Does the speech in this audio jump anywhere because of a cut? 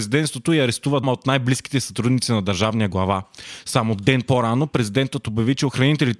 yes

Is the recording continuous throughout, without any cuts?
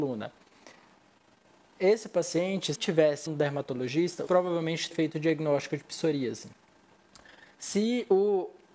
no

